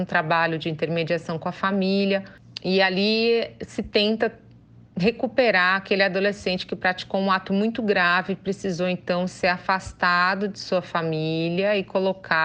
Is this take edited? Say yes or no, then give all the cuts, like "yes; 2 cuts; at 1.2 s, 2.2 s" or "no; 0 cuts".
no; 0 cuts